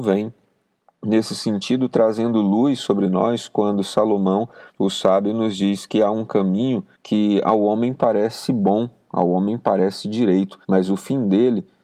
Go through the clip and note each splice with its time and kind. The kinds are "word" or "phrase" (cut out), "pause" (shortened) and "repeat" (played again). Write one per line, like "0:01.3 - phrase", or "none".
0:04.7 - pause
0:06.9 - pause
0:10.6 - pause